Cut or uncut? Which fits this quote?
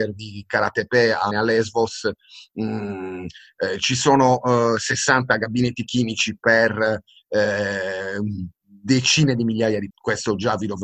cut